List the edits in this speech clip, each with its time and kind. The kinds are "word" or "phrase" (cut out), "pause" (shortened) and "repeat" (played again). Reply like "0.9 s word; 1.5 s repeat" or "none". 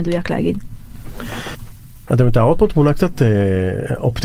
none